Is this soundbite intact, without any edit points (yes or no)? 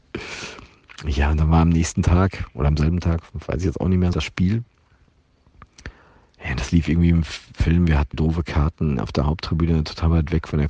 no